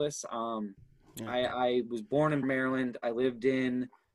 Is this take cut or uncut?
cut